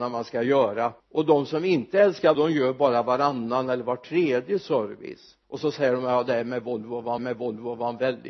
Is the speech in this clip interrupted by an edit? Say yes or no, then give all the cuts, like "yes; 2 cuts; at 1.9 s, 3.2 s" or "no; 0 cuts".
yes; 4 cuts; at 1.0 s, 2.3 s, 5.4 s, 7.2 s